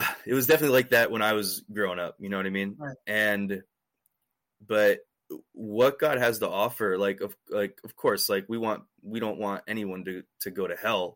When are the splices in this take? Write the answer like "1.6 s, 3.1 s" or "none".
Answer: none